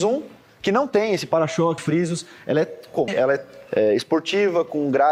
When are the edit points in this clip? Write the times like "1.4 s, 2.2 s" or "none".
1.8 s, 3.1 s, 3.7 s

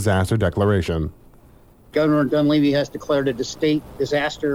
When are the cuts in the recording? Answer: none

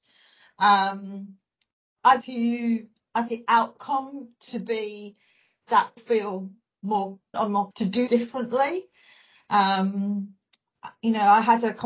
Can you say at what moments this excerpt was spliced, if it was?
2.2 s, 3.3 s, 6.0 s, 7.3 s, 7.7 s, 8.1 s

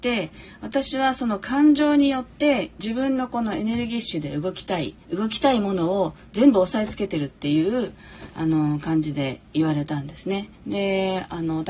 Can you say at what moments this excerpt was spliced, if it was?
5.0 s, 10.6 s

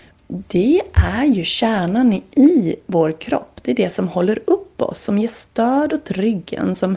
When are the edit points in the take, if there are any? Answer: none

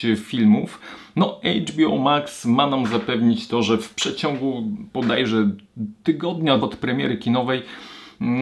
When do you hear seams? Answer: 6.6 s

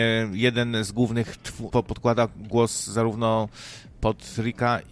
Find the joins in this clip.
1.7 s

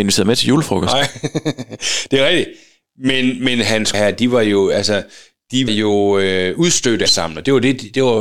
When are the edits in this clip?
3.9 s, 5.7 s, 7.1 s

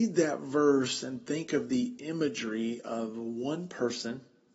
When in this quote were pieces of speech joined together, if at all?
none

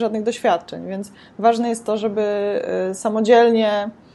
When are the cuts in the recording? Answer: none

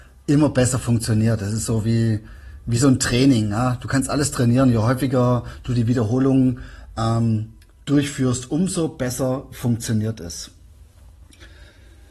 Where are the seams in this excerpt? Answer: none

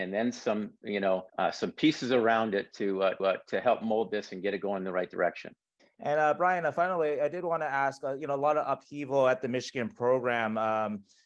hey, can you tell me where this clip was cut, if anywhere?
1.3 s, 3.2 s, 5.8 s

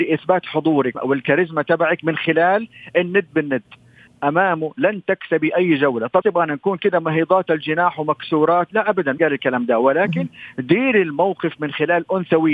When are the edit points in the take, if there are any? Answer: 0.9 s, 4.1 s, 6.2 s, 9.2 s

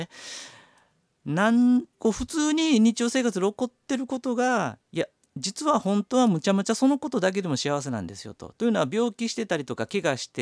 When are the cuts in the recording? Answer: 1.9 s

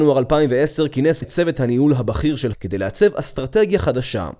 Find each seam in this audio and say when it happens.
1.2 s, 2.5 s

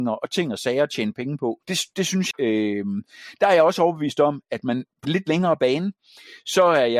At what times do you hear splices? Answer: 1.6 s, 2.3 s, 5.0 s

